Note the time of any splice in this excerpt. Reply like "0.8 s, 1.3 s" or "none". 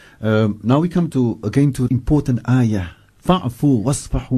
1.1 s, 1.9 s